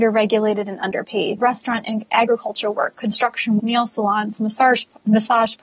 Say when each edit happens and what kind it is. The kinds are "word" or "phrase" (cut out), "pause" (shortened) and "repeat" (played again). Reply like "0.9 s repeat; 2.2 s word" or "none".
1.4 s word; 2.1 s word; 3.6 s word